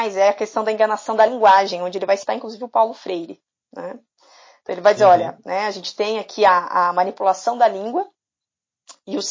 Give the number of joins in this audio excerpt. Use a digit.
0